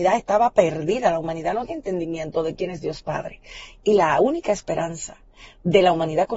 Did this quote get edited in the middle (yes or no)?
yes